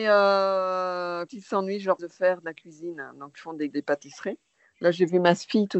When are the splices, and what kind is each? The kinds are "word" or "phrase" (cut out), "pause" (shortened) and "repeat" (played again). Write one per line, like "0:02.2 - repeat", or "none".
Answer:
0:01.3 - word
0:02.0 - word
0:03.3 - word
0:03.7 - word